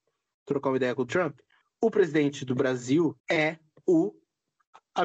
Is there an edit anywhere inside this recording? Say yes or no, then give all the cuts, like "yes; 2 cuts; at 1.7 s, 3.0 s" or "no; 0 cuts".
yes; 3 cuts; at 1.1 s, 1.6 s, 3.2 s